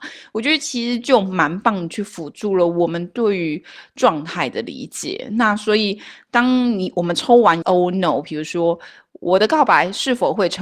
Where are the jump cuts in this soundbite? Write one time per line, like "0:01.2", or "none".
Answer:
0:07.6